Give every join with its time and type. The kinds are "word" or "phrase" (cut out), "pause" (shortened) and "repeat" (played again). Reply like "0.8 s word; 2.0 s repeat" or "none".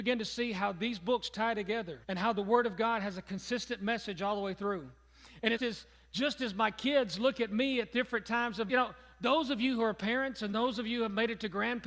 2.0 s pause; 5.6 s phrase; 8.7 s phrase